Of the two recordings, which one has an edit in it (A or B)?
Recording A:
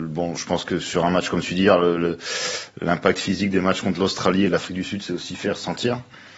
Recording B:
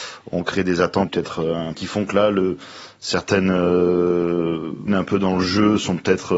B